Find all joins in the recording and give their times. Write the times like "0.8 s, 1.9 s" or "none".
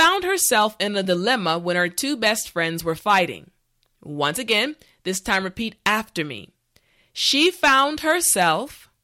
none